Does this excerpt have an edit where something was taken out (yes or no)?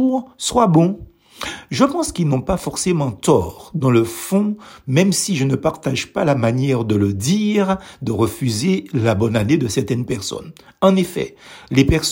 no